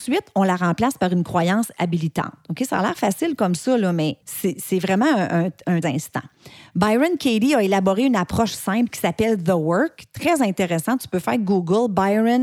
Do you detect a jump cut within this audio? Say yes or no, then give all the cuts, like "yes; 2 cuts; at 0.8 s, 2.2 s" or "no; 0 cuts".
yes; 2 cuts; at 4.2 s, 5.8 s